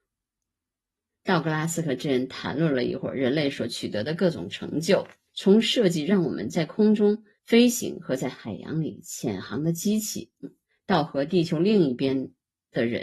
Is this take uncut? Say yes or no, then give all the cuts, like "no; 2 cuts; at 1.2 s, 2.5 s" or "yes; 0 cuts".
no; 2 cuts; at 5.3 s, 7.4 s